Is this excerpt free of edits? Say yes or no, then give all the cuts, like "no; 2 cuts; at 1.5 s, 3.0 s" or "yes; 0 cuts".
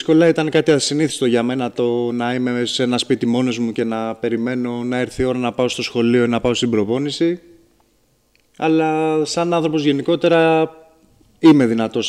yes; 0 cuts